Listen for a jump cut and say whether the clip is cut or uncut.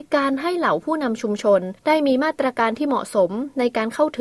cut